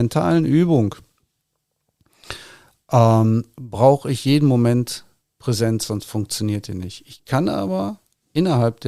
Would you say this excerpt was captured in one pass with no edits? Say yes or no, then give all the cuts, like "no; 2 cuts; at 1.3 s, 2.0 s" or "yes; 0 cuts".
yes; 0 cuts